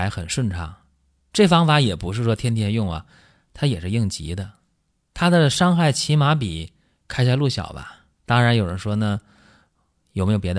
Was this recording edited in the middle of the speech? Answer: yes; 2 cuts; at 6.8 s, 8.1 s

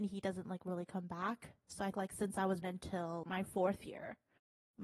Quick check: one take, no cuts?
no; 3 cuts; at 1.9 s, 2.6 s, 3.2 s

